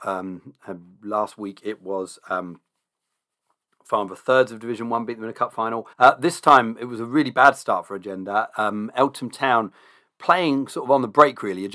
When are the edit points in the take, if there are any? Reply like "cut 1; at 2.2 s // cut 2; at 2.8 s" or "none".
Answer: cut 1; at 5.9 s